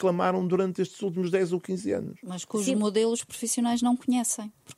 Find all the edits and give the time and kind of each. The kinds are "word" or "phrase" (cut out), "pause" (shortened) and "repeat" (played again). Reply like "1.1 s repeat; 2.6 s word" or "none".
none